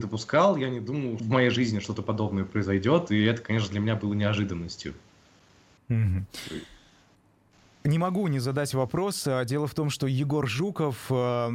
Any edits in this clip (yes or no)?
yes